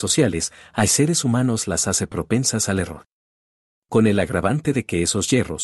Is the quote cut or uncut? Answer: uncut